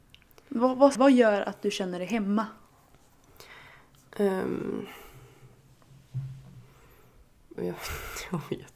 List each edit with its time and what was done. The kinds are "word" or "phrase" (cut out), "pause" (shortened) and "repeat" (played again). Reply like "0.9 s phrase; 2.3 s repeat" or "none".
0.9 s word; 7.5 s word